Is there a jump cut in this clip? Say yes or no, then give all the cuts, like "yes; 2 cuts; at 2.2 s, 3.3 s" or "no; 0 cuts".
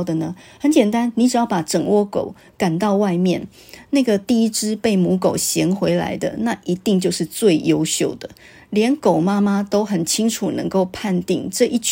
no; 0 cuts